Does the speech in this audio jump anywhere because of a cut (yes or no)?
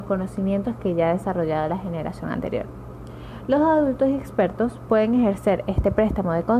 no